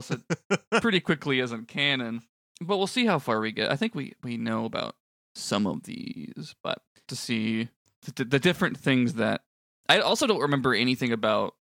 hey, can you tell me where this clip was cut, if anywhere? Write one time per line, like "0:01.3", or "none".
0:07.1